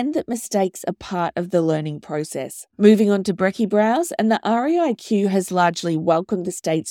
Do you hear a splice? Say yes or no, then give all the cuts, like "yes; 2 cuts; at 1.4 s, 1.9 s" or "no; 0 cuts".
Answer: no; 0 cuts